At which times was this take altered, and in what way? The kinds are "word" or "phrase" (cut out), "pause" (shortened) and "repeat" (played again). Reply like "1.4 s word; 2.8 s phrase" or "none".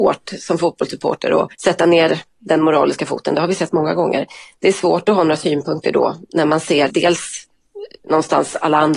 1.5 s pause; 6.9 s word

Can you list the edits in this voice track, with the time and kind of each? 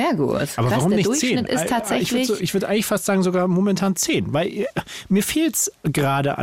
none

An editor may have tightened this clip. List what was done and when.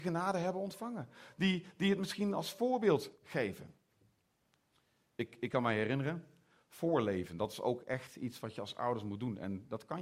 none

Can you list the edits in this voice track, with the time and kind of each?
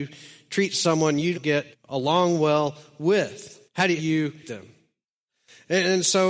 1.3 s word; 1.7 s pause; 3.6 s pause; 4.0 s phrase; 4.4 s word

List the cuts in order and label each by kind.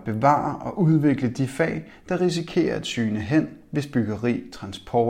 none

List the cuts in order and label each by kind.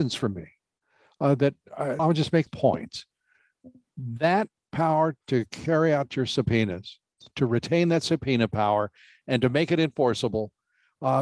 2.0 s phrase; 2.5 s phrase; 5.2 s pause

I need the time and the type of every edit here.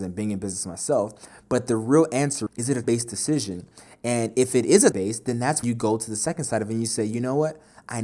2.5 s word; 2.8 s word; 4.9 s word; 5.6 s word

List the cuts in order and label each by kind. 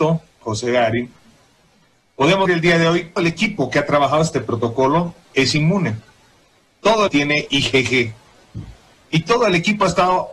2.5 s word; 3.2 s phrase; 7.1 s phrase

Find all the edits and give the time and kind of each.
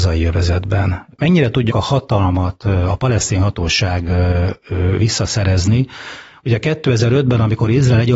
1.7 s word

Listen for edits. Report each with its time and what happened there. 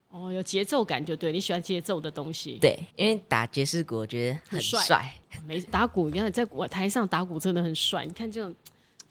2.9 s pause; 5.7 s phrase

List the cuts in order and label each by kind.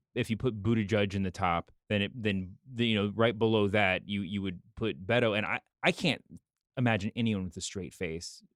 1.8 s pause; 5.7 s pause

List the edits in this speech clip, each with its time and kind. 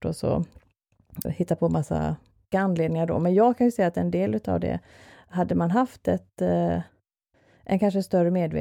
1.2 s word; 2.5 s word

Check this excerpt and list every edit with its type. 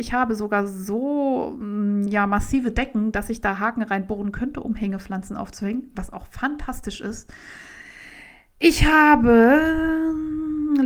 none

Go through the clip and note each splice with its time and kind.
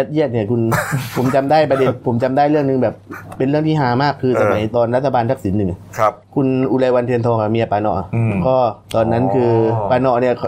6.2 s pause; 8.8 s pause

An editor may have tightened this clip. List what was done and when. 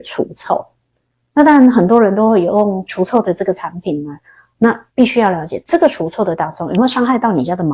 4.9 s pause

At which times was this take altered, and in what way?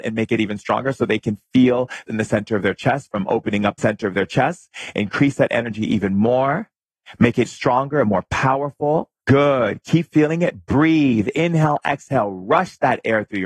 2.0 s phrase; 3.8 s phrase; 7.4 s word; 9.2 s pause

